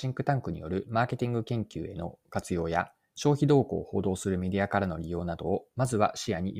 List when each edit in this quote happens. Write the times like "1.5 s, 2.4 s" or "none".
none

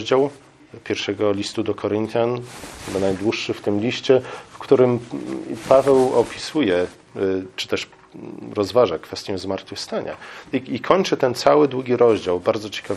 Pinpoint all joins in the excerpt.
none

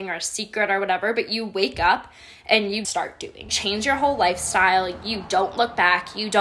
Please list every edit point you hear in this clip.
2.8 s, 3.5 s

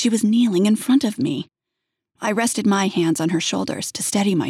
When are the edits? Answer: none

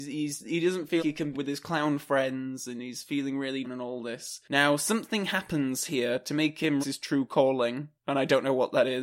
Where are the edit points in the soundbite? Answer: 1.0 s, 1.3 s, 3.6 s, 6.8 s

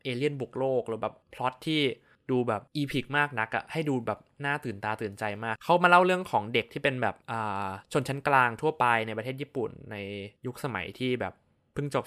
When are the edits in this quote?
1.2 s, 2.1 s, 2.7 s, 7.2 s, 7.8 s, 10.4 s

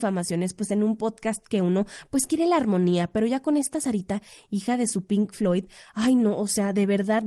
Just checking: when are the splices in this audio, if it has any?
none

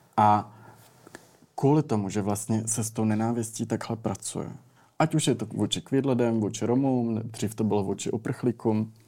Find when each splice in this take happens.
none

